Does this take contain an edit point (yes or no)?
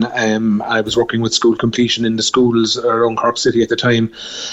no